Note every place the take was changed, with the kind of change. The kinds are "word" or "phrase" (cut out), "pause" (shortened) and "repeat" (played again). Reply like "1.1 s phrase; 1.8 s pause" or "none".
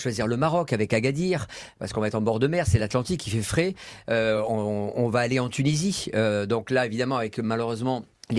none